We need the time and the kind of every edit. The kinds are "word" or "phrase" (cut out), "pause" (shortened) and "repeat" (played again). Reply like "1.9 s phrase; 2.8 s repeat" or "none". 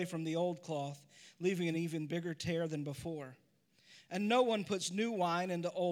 none

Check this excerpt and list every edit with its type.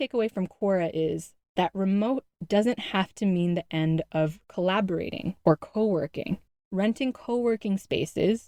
4.4 s pause; 6.5 s pause

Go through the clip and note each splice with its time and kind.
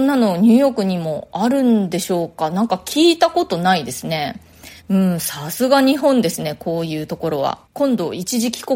4.8 s pause; 7.6 s pause

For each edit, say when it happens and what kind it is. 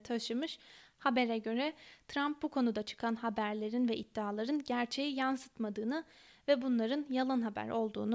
none

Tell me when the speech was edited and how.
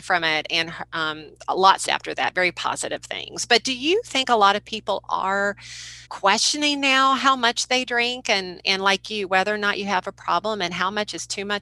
1.9 s phrase; 6.1 s pause

